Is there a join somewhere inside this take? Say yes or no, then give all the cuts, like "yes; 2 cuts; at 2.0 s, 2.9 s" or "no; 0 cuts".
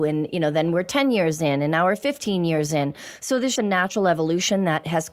yes; 1 cut; at 3.6 s